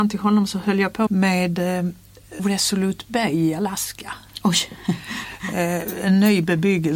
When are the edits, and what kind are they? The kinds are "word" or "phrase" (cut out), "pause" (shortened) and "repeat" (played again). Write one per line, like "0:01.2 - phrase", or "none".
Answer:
0:01.1 - word
0:02.4 - phrase

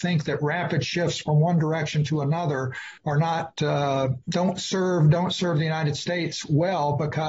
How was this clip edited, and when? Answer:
0:03.0 - pause
0:04.2 - pause

